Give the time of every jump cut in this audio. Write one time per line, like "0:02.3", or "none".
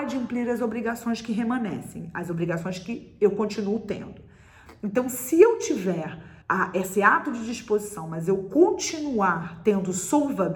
0:06.4